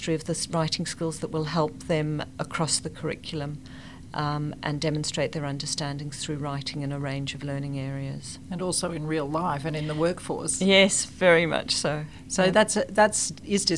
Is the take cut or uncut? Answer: uncut